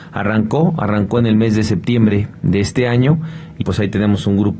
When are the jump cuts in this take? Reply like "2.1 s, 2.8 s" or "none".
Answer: 3.6 s